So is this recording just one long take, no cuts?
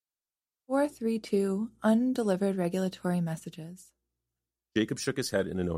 yes; 0 cuts

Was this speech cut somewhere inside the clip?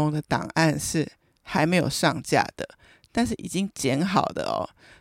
no; 0 cuts

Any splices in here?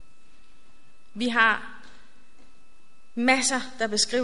no; 0 cuts

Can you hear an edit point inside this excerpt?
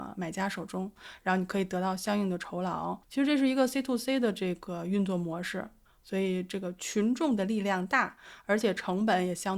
yes; 1 cut; at 3.0 s

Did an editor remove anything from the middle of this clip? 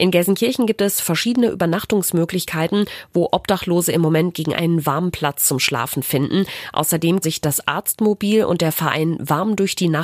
yes; 2 cuts; at 4.5 s, 7.2 s

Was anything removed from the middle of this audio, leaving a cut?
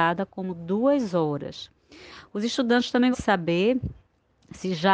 yes; 1 cut; at 3.1 s

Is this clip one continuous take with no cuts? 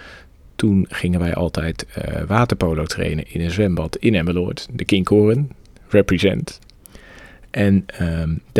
yes; 0 cuts

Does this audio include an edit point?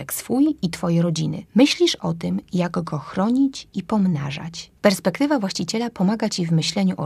yes; 2 cuts; at 1.5 s, 4.8 s

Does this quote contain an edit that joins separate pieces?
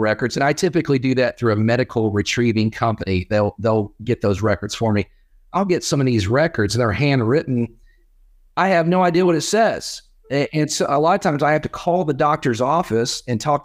no; 0 cuts

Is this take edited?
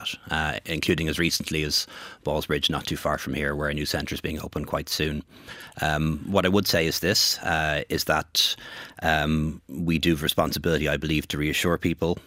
no; 0 cuts

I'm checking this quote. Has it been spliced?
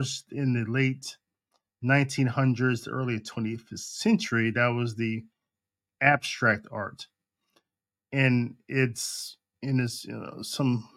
no; 0 cuts

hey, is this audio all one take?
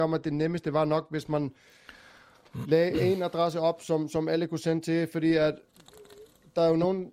yes; 0 cuts

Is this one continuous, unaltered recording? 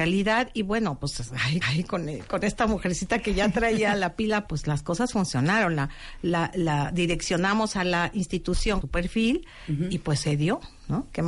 no; 3 cuts; at 1.6 s, 4.5 s, 8.8 s

